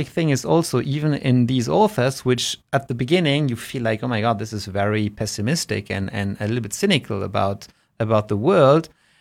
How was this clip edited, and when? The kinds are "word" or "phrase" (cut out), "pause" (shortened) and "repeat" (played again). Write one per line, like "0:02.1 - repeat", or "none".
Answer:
none